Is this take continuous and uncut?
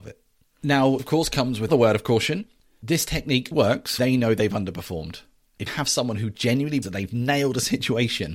no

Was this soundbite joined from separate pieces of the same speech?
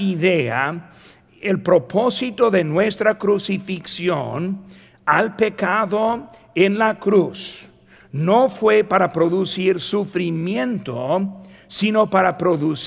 no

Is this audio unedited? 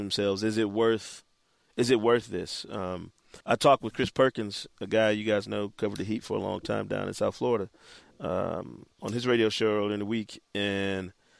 no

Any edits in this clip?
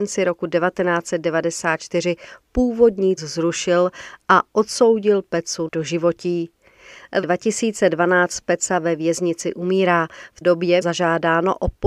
yes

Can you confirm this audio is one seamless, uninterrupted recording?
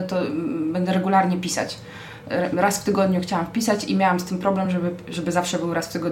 yes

